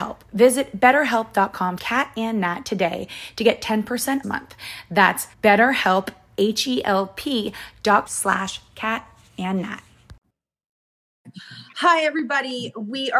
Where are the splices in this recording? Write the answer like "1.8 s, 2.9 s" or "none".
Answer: 1.8 s, 4.2 s, 5.3 s, 8.1 s